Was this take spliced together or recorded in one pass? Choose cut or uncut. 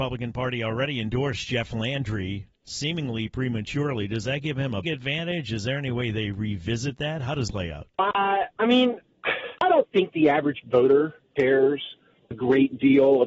cut